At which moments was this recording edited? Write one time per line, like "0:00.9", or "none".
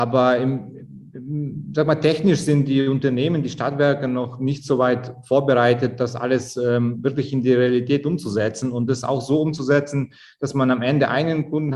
none